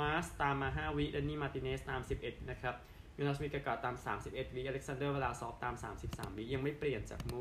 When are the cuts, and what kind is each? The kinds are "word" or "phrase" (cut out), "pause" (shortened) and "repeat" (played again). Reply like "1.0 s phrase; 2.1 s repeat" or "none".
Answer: 2.5 s phrase